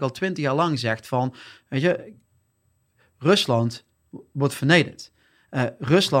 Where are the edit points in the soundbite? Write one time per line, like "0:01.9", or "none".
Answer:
none